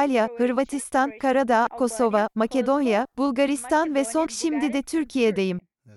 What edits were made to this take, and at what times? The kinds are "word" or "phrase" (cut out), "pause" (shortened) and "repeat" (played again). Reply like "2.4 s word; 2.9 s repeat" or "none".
1.7 s word; 4.3 s word